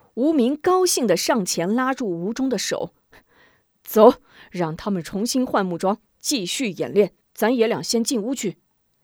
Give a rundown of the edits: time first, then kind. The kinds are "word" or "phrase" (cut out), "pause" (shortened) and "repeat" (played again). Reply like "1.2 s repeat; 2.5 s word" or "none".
none

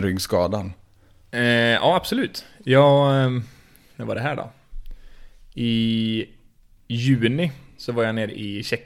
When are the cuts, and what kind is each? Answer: none

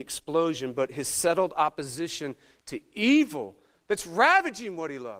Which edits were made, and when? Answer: none

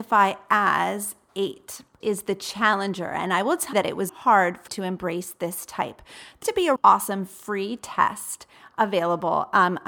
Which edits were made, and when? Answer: 1.3 s word; 2.0 s word; 3.7 s word; 4.1 s word; 4.7 s word; 6.4 s word; 6.8 s word

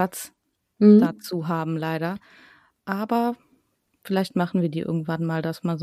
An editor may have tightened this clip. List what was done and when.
none

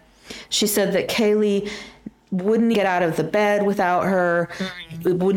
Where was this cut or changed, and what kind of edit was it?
2.7 s word

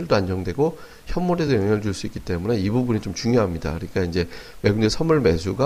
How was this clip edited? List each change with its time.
none

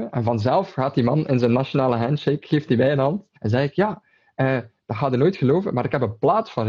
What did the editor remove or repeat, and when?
3.4 s pause

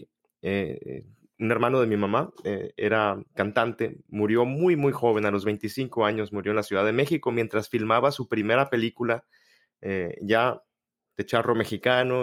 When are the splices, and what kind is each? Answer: 3.3 s pause

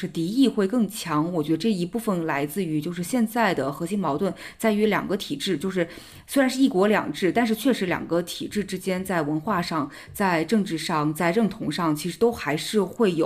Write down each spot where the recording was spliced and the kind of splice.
none

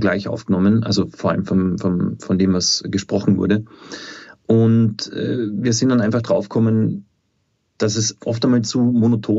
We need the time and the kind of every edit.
none

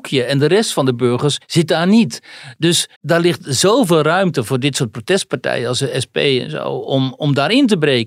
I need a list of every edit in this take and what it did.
1.4 s pause; 3.0 s pause

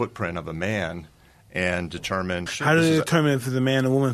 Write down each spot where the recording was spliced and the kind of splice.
2.5 s word

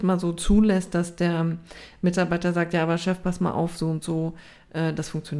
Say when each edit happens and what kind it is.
none

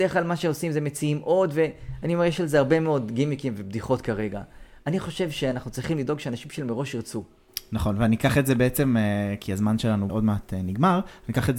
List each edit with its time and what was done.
10.1 s word

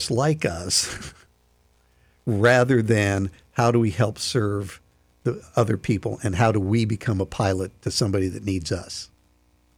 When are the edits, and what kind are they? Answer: none

